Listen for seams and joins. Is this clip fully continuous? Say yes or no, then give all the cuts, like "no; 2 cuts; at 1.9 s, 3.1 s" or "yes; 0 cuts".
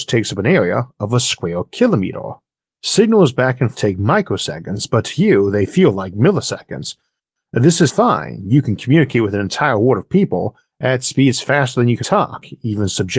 no; 3 cuts; at 3.7 s, 7.9 s, 12.0 s